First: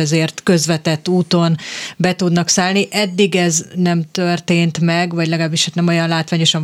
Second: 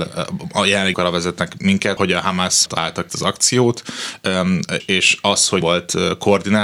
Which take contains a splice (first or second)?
second